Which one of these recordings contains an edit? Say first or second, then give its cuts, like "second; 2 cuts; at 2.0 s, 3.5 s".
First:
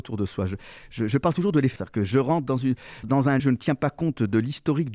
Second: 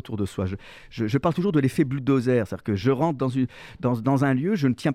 first; 3 cuts; at 1.8 s, 3.0 s, 3.4 s